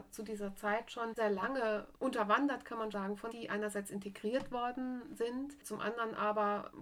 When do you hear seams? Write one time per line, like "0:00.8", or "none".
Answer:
0:01.2
0:02.9
0:03.3